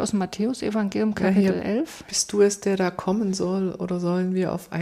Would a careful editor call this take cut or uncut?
uncut